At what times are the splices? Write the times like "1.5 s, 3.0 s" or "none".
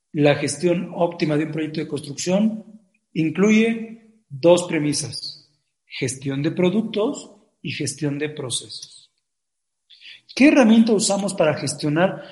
none

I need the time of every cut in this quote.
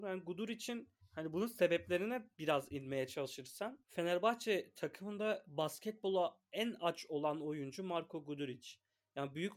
1.0 s, 2.3 s, 3.8 s

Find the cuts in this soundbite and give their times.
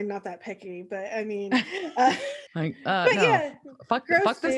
2.5 s

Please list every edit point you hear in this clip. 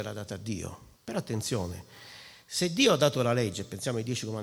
1.0 s

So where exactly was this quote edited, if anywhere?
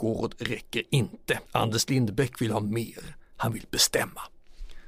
1.5 s

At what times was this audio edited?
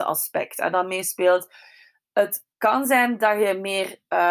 2.5 s

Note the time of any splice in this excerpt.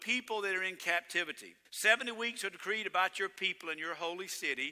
1.6 s

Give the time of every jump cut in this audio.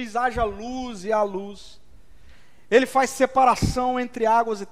none

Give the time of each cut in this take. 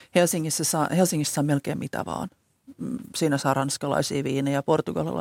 none

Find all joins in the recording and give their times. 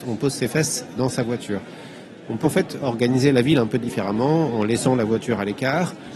0.9 s, 2.4 s

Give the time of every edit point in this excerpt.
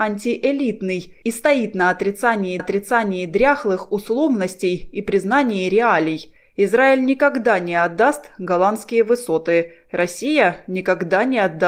2.6 s

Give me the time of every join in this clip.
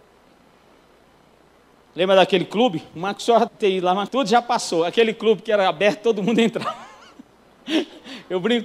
3.5 s, 4.1 s

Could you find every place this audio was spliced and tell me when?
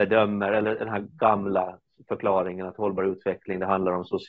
none

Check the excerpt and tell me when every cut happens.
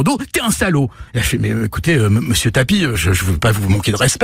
1.1 s, 2.9 s

